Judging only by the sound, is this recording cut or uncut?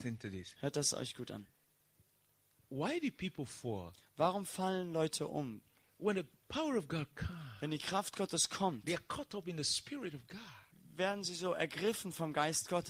uncut